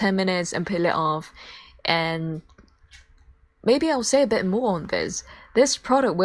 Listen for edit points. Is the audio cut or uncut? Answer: uncut